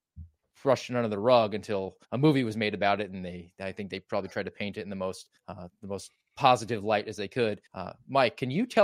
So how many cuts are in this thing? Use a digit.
3